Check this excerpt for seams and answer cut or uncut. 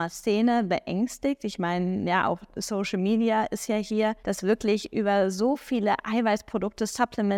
uncut